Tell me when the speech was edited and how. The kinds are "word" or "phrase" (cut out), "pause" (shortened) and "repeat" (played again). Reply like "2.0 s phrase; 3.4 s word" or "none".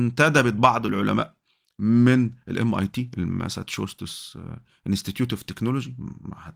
none

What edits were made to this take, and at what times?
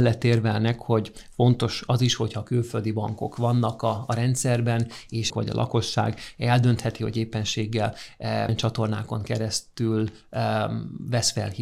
5.3 s phrase; 8.5 s word

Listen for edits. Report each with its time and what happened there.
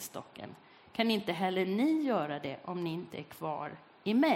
none

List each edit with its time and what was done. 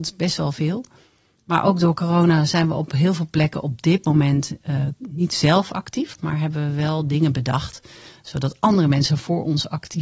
none

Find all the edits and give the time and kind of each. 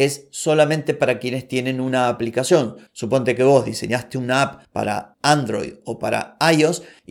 none

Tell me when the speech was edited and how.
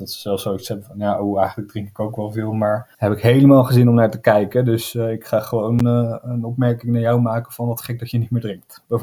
2.9 s pause

